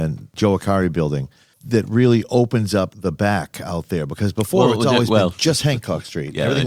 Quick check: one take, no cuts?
yes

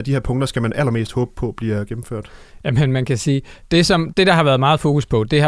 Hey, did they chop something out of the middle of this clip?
yes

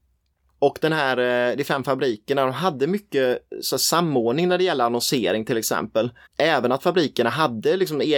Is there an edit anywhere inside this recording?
yes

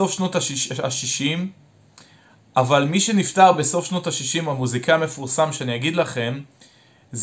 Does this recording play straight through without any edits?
yes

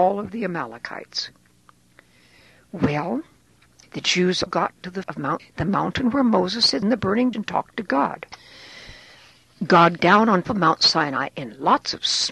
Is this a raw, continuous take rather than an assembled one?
no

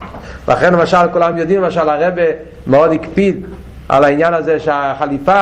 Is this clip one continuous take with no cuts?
yes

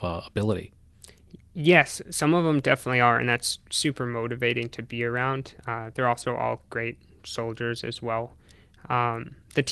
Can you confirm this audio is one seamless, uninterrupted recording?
yes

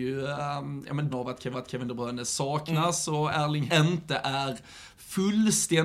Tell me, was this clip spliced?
yes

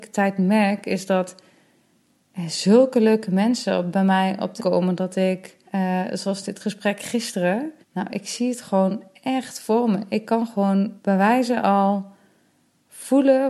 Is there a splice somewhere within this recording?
yes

